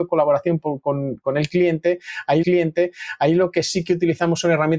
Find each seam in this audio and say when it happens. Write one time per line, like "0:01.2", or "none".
0:02.4